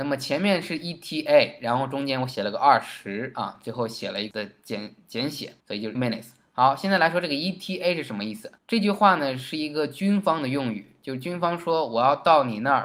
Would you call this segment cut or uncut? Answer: cut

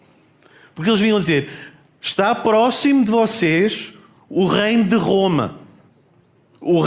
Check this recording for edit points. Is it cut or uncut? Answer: uncut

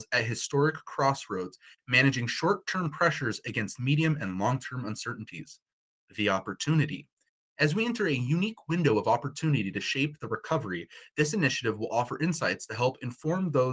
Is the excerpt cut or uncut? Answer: uncut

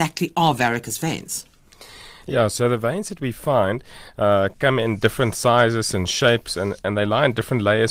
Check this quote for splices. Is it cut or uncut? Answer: uncut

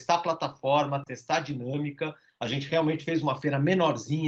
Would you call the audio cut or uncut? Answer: uncut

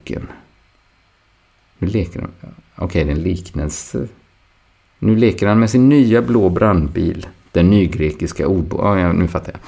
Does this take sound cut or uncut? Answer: uncut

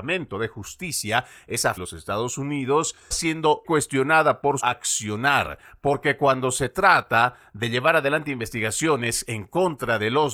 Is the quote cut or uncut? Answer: cut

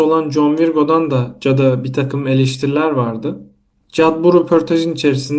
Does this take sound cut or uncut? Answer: uncut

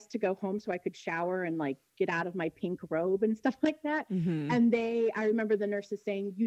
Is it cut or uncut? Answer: uncut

